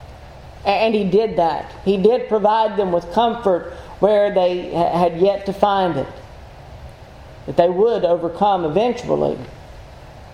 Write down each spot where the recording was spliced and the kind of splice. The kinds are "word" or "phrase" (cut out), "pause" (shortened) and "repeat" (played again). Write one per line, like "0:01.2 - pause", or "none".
none